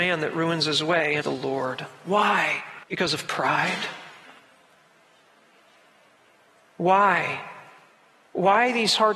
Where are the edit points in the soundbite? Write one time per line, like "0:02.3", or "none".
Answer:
0:01.2
0:02.8